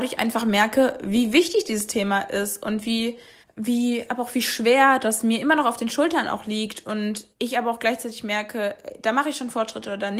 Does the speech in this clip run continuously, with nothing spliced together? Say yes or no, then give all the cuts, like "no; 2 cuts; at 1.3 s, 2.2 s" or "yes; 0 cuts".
no; 2 cuts; at 3.4 s, 7.3 s